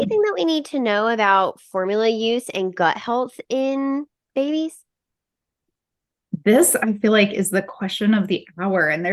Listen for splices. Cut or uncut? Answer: uncut